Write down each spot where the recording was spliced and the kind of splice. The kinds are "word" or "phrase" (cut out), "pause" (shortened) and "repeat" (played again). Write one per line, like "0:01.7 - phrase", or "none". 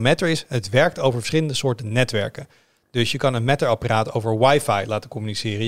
none